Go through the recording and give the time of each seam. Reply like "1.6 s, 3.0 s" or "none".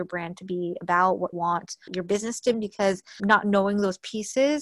1.3 s, 1.9 s, 2.5 s, 3.2 s